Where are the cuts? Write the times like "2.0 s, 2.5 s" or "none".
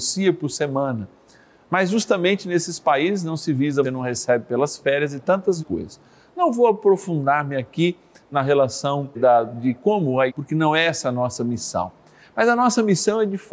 3.8 s, 5.6 s, 9.1 s, 10.3 s